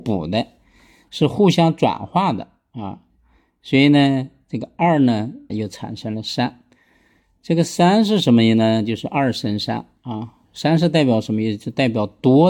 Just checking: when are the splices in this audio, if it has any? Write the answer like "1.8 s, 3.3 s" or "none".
5.5 s